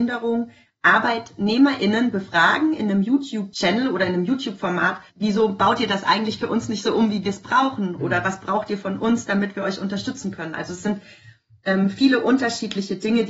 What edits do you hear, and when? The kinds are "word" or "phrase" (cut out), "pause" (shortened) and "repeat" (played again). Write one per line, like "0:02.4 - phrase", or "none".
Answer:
0:05.1 - pause